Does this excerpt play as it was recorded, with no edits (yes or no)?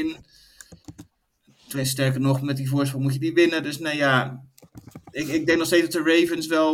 yes